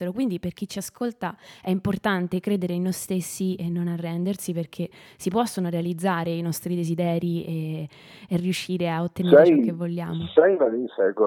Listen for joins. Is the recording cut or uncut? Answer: uncut